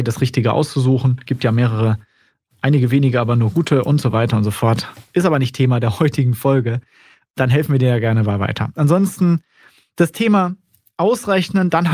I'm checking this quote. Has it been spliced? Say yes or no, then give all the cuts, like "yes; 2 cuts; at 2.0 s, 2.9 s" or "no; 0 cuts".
no; 0 cuts